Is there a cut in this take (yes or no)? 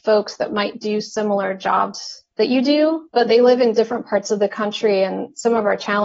no